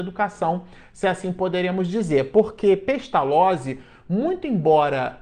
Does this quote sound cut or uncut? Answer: uncut